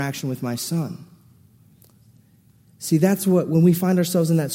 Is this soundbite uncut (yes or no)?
yes